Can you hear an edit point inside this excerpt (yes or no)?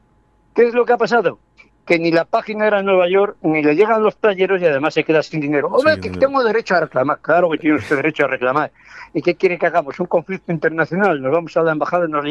no